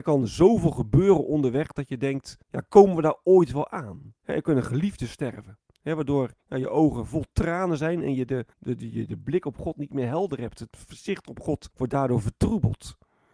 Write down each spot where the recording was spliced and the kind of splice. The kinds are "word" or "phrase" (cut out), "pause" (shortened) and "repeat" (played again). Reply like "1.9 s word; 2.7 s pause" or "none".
2.4 s pause; 4.2 s pause; 5.7 s pause; 6.4 s pause; 8.5 s pause; 11.7 s pause

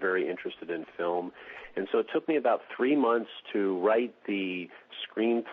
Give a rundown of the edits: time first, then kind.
none

